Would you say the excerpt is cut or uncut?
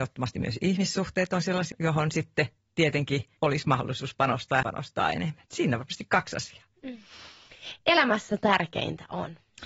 cut